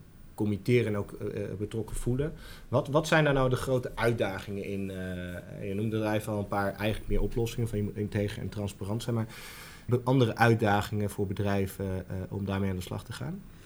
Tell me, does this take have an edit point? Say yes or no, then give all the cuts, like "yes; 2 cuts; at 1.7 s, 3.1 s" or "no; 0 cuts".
yes; 1 cut; at 9.9 s